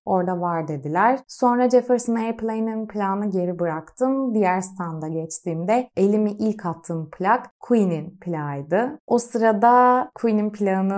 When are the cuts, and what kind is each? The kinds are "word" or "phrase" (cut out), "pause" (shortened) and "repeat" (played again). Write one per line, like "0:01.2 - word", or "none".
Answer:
none